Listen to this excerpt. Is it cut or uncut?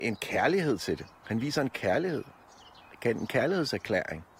uncut